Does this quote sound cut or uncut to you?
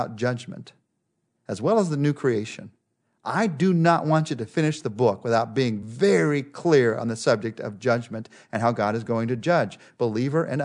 uncut